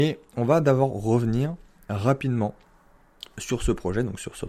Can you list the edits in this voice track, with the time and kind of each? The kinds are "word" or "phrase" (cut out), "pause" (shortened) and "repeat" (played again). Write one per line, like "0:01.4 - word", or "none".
none